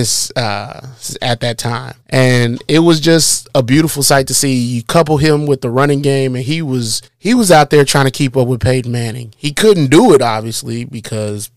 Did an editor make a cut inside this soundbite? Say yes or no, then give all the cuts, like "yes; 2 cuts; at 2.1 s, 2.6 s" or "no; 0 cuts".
yes; 2 cuts; at 2.0 s, 7.1 s